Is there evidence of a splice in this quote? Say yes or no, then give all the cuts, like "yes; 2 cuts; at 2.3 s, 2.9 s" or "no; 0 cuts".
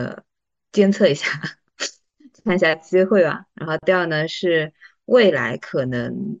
no; 0 cuts